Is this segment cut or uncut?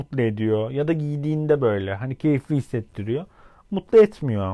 uncut